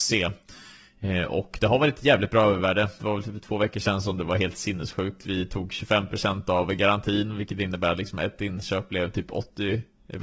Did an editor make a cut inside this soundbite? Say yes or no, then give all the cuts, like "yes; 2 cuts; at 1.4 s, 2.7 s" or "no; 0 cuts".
no; 0 cuts